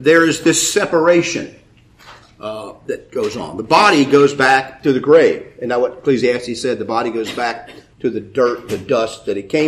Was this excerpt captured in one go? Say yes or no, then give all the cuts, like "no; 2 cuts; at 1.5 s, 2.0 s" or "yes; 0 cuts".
yes; 0 cuts